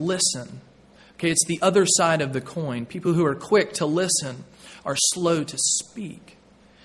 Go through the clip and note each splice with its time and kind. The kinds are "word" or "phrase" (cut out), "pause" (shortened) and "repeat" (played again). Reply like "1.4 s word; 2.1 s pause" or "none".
none